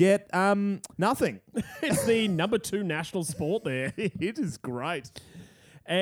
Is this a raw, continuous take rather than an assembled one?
no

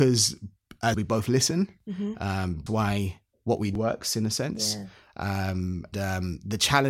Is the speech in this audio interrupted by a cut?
yes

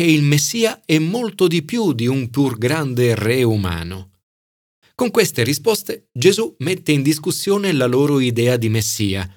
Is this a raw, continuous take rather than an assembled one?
yes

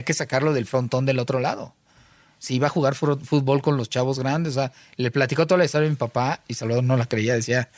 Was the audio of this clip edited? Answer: no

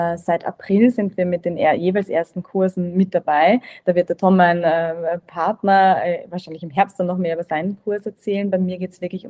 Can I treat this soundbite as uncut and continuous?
yes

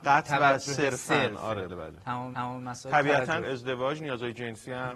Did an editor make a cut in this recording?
yes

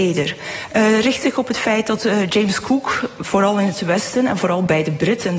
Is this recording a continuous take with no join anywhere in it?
yes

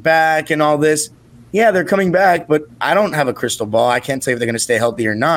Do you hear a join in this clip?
no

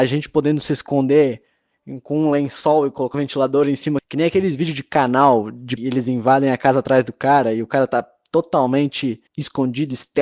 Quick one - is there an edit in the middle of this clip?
yes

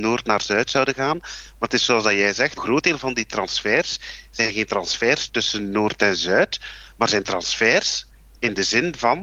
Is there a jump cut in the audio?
yes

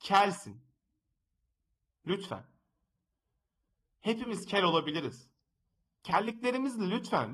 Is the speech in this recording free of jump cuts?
yes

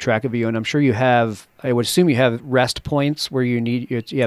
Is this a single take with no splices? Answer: yes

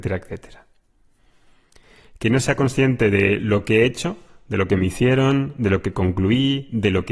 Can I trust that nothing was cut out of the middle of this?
yes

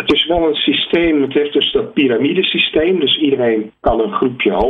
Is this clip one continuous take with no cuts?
yes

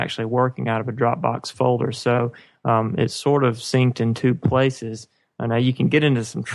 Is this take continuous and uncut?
yes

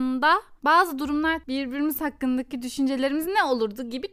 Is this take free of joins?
no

